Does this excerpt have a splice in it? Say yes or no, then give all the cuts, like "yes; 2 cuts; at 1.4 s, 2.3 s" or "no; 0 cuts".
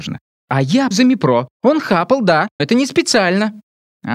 yes; 3 cuts; at 0.9 s, 1.5 s, 2.6 s